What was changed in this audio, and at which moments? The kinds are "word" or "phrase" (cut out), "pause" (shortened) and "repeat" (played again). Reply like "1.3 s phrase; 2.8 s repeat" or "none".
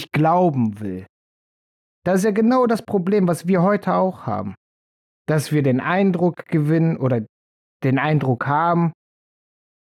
none